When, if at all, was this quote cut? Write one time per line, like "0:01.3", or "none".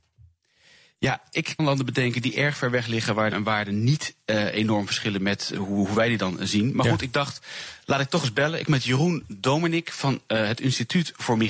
0:01.6
0:03.3
0:08.7